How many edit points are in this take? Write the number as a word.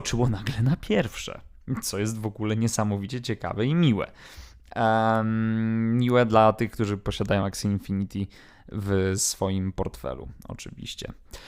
zero